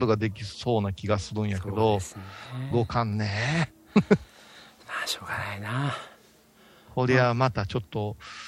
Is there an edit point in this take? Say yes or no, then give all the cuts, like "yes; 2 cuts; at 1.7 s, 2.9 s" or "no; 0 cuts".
yes; 1 cut; at 2.7 s